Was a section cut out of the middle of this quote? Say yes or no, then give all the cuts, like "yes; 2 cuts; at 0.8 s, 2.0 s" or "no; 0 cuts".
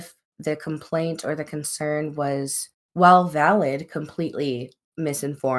no; 0 cuts